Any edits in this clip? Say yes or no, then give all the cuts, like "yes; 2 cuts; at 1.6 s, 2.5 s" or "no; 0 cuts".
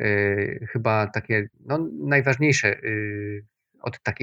yes; 1 cut; at 1.5 s